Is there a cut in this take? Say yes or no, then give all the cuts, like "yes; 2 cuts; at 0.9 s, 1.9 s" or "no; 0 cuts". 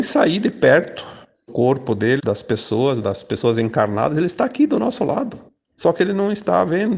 yes; 3 cuts; at 1.5 s, 2.2 s, 3.0 s